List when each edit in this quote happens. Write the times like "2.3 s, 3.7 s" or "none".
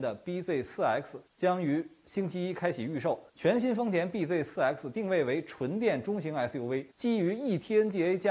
1.3 s, 3.3 s, 6.9 s